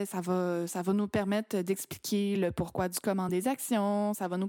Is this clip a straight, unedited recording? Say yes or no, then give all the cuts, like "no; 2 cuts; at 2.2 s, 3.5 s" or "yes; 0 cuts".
yes; 0 cuts